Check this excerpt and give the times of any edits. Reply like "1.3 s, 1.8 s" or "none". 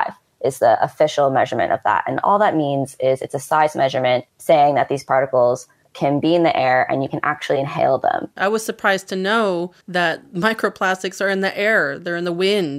4.3 s, 5.8 s, 9.8 s